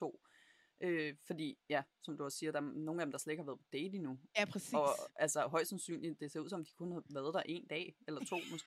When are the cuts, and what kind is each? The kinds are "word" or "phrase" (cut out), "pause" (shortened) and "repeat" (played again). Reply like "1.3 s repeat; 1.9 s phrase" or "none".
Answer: 1.6 s pause